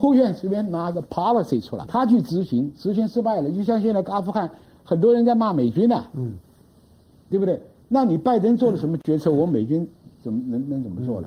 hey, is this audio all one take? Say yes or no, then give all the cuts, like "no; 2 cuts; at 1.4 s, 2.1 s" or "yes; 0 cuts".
no; 1 cut; at 1.9 s